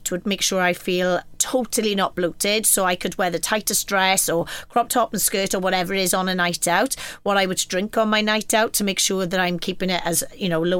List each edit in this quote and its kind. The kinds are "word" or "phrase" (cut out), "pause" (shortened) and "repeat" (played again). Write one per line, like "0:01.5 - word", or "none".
none